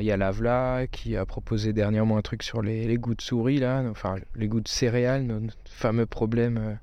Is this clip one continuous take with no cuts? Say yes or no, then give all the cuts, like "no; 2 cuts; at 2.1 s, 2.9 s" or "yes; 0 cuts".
yes; 0 cuts